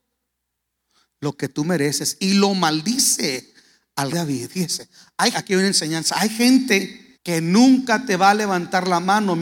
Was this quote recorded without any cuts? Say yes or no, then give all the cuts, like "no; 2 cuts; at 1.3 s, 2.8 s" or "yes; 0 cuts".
no; 3 cuts; at 4.1 s, 5.3 s, 7.1 s